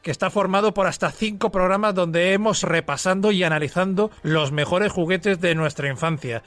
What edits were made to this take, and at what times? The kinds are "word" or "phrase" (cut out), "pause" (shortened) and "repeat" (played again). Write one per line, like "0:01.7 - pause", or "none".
0:02.6 - word
0:04.1 - pause